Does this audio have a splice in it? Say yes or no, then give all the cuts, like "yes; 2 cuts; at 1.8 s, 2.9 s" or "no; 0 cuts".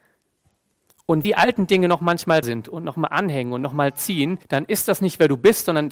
yes; 3 cuts; at 1.2 s, 2.4 s, 4.4 s